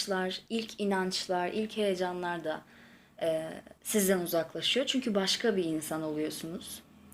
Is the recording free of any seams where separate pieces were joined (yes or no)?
no